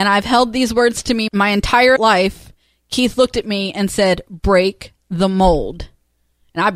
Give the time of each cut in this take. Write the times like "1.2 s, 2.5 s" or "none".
1.3 s, 2.0 s